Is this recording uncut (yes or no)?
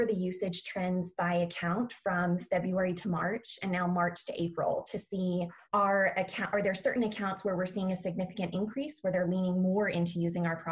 no